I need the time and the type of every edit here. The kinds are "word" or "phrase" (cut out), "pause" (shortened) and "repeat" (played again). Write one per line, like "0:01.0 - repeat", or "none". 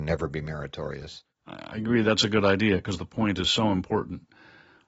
none